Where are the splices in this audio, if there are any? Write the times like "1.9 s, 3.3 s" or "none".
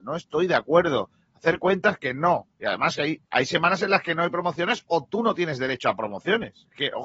3.3 s